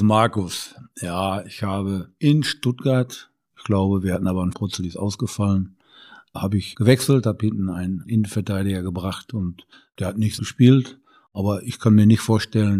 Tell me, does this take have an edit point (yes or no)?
yes